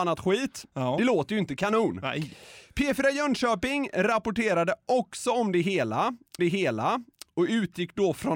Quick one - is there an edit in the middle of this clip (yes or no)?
yes